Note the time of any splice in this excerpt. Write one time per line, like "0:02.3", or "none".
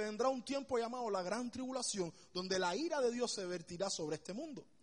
none

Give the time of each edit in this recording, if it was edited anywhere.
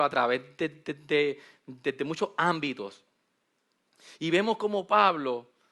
none

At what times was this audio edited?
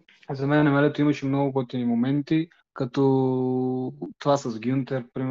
0:02.6

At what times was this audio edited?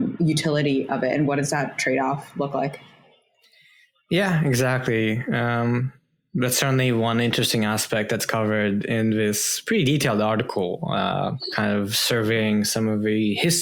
none

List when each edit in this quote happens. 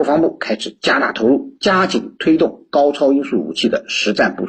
none

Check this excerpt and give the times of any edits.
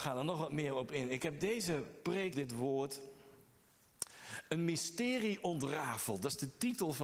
0:02.3

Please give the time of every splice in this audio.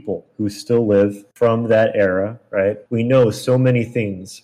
0:01.3
0:02.9

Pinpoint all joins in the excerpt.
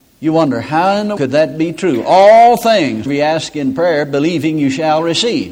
0:01.2
0:03.1

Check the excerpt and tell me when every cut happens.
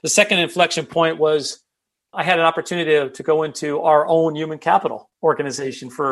0:02.1
0:05.1

